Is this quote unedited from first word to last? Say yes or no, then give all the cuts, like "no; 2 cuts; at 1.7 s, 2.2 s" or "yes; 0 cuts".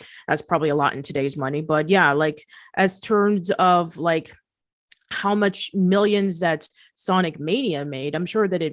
yes; 0 cuts